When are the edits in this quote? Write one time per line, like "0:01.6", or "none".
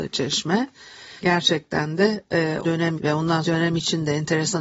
0:01.2
0:02.6
0:03.0
0:03.4